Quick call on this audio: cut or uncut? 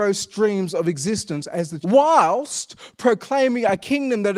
cut